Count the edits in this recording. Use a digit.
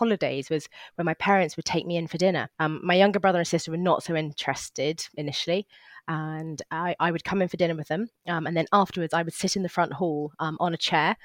1